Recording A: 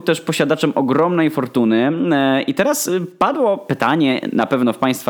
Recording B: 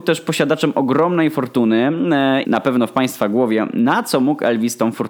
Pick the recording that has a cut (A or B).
B